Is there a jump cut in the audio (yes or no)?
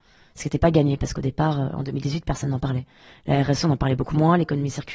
no